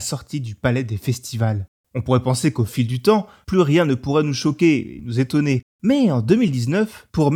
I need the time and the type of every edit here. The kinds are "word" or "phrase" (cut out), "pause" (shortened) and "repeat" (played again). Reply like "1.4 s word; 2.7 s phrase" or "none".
none